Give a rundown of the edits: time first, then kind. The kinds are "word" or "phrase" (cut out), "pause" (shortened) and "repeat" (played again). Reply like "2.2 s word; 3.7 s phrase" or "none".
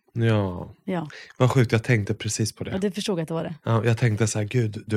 none